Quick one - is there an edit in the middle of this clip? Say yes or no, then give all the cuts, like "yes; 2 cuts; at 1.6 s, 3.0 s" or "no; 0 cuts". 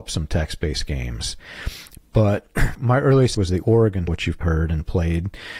yes; 4 cuts; at 2.7 s, 3.3 s, 4.1 s, 4.4 s